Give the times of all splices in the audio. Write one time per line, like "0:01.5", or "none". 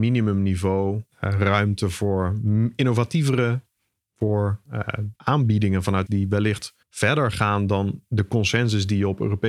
0:01.1
0:04.7
0:05.2
0:06.1
0:06.8